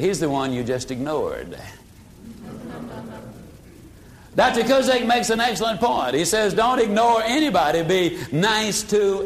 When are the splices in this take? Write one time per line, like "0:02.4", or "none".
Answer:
none